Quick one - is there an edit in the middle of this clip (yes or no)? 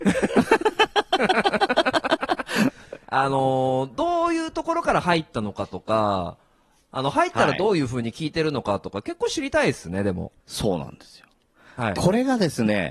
yes